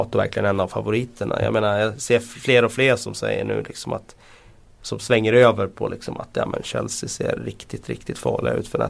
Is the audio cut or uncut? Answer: uncut